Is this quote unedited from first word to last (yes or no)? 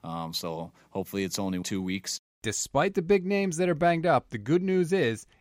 no